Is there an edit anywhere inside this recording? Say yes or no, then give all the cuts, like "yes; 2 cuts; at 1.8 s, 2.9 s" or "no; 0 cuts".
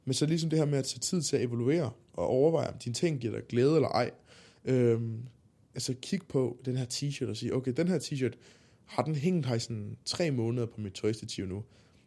no; 0 cuts